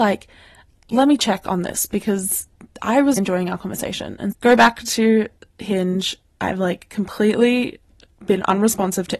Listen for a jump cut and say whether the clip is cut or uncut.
cut